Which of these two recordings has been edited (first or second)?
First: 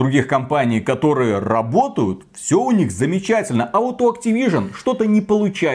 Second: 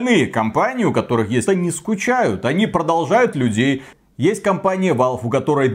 second